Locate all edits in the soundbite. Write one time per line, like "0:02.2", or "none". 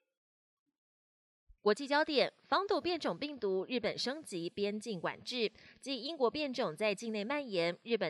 0:01.6